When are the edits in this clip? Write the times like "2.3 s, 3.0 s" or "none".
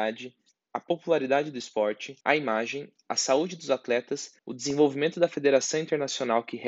2.2 s, 4.4 s